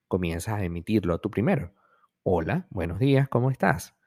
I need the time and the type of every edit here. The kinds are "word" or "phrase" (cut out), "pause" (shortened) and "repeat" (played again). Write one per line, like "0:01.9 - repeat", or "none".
none